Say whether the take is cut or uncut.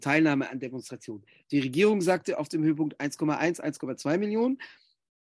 uncut